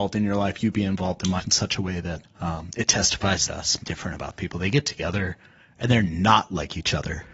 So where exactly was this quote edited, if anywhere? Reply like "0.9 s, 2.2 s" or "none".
1.4 s, 2.3 s, 3.5 s, 3.8 s, 4.4 s